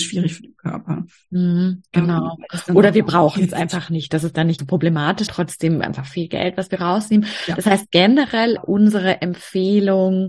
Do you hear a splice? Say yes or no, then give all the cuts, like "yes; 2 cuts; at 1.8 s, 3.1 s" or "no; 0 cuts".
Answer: yes; 3 cuts; at 4.6 s, 5.3 s, 8.6 s